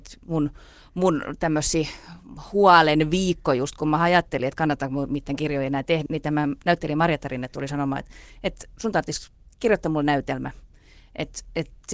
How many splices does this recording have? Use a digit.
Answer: 1